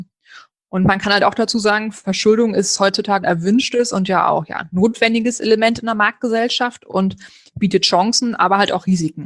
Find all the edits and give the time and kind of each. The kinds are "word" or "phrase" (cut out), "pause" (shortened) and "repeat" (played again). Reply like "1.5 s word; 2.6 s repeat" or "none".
3.2 s word